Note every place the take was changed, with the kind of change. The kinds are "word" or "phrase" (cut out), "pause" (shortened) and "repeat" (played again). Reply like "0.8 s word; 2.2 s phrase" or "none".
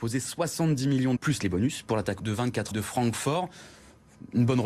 1.2 s word; 2.2 s word; 2.7 s phrase